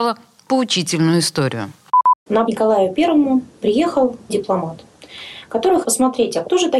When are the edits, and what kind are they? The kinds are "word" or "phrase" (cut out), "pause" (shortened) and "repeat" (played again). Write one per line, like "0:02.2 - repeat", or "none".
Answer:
0:02.5 - phrase
0:04.3 - word
0:05.8 - word